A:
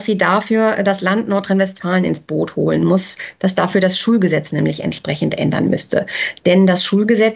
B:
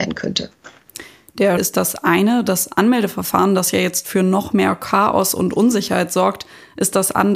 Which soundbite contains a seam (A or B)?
B